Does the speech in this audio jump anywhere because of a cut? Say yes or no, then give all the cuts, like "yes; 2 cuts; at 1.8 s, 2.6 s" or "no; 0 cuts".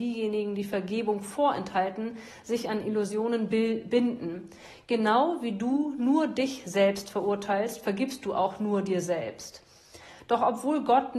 no; 0 cuts